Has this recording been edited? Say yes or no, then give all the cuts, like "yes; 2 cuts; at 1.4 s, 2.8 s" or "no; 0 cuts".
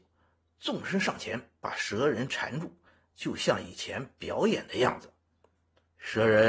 no; 0 cuts